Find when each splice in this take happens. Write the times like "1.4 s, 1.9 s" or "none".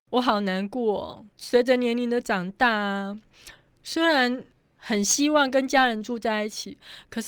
1.3 s

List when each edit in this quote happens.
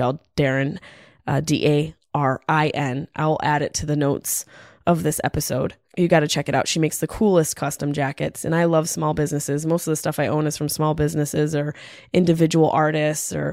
none

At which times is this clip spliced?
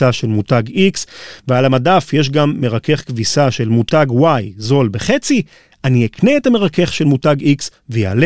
none

